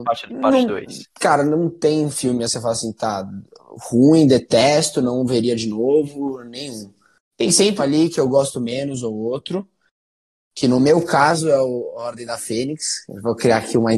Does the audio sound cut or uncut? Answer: cut